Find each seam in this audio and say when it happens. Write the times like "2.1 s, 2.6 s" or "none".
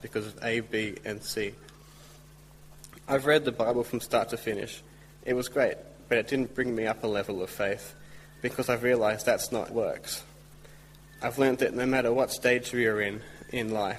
9.7 s

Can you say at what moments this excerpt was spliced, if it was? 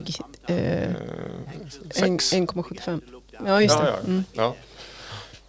none

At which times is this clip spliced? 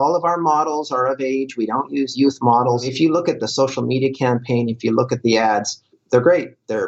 5.2 s, 5.9 s

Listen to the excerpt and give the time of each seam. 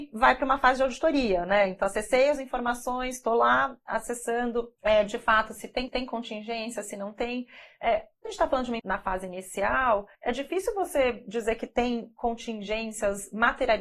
4.8 s, 5.9 s, 8.2 s, 8.8 s, 10.1 s

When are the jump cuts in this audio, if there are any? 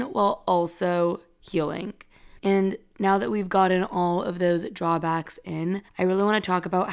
2.4 s, 5.9 s

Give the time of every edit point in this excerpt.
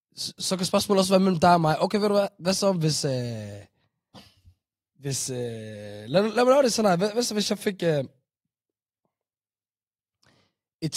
none

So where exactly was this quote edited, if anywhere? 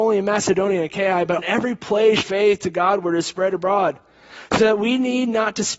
1.4 s, 2.2 s

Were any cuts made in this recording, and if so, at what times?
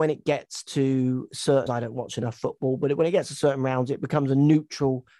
1.7 s

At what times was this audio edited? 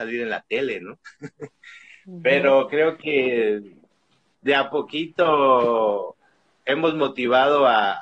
none

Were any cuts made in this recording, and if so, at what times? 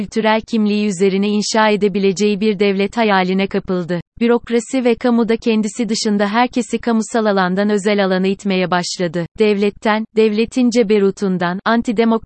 4.1 s, 9.3 s

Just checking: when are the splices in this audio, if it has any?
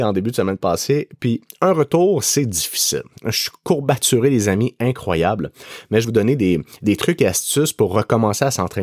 6.0 s

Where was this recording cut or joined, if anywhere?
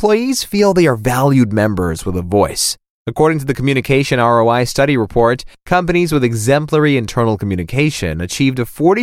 none

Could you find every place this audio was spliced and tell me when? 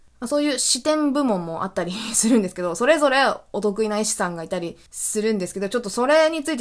4.9 s

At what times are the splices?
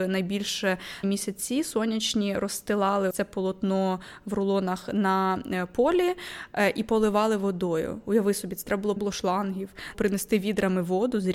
1.0 s, 3.1 s, 9.0 s, 9.9 s

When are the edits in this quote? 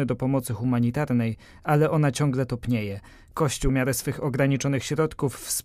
3.7 s

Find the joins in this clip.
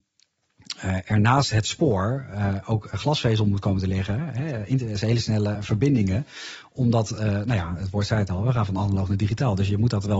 5.5 s

